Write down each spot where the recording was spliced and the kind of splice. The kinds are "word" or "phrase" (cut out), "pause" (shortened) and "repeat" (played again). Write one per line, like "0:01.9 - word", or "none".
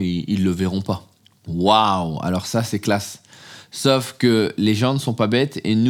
0:01.2 - pause